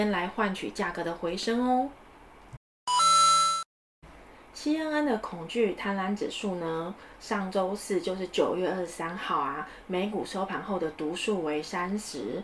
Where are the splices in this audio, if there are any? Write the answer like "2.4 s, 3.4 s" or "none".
none